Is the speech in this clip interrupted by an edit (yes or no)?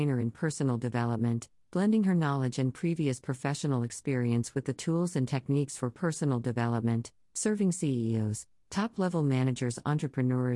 no